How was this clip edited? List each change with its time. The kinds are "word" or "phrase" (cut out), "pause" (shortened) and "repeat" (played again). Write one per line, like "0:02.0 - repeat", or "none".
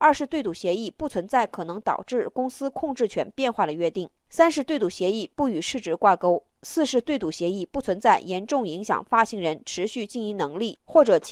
0:04.2 - pause
0:06.5 - pause